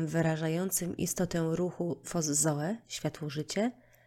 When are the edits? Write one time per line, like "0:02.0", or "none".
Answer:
0:02.0